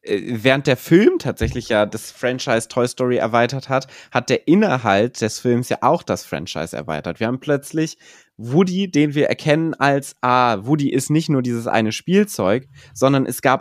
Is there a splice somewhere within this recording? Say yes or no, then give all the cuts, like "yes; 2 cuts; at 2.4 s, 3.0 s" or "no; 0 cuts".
no; 0 cuts